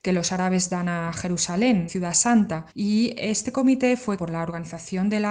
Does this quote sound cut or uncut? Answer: cut